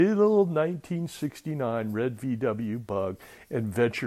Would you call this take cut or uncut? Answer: uncut